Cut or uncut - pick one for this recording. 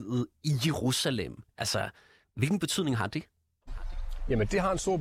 uncut